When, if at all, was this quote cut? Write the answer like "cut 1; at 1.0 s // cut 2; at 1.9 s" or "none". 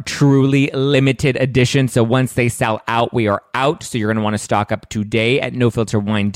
none